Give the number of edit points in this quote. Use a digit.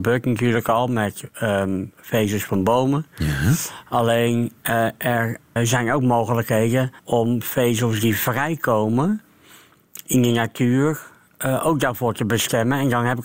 2